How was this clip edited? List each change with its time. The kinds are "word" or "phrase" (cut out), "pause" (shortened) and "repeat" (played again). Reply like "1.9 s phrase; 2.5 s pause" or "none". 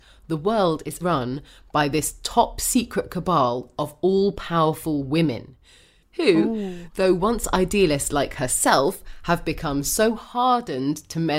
1.0 s word